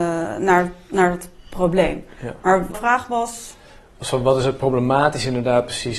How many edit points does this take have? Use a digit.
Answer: 1